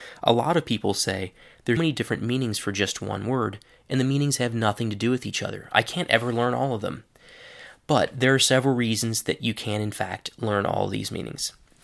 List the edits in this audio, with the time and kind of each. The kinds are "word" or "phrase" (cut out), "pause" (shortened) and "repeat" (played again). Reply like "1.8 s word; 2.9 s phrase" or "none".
1.8 s word